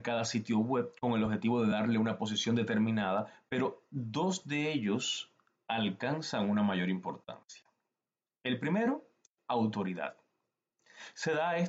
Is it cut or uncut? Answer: uncut